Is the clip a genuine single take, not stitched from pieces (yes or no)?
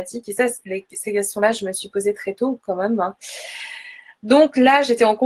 yes